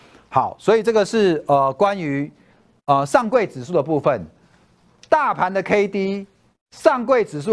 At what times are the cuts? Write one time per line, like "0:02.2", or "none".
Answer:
none